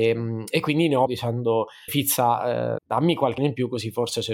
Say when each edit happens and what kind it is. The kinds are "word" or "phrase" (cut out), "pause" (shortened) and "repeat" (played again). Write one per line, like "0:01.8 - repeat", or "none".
0:01.1 - word
0:01.9 - word
0:02.8 - word
0:03.4 - word